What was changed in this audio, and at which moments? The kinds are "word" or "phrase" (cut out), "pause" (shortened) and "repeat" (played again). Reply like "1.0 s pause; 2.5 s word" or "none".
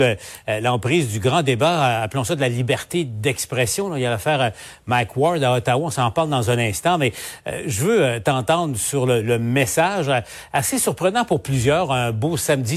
none